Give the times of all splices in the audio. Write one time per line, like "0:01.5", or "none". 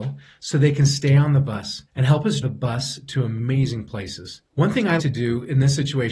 0:01.9
0:02.4
0:04.4
0:05.0